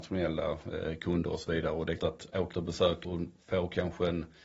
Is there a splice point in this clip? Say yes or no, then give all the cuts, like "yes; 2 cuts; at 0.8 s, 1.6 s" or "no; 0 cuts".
yes; 3 cuts; at 2.0 s, 2.5 s, 3.0 s